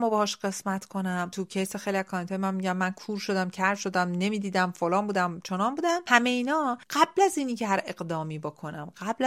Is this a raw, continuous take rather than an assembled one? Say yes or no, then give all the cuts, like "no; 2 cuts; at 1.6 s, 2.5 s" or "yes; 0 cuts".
yes; 0 cuts